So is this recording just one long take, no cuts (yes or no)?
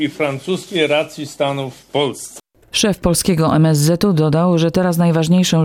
yes